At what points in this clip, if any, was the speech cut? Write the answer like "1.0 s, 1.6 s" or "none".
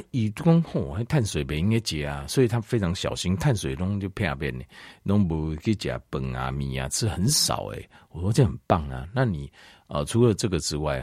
none